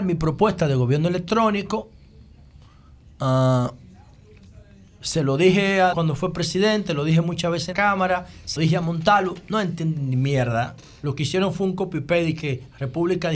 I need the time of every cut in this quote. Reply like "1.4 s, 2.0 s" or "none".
5.9 s, 7.7 s, 8.6 s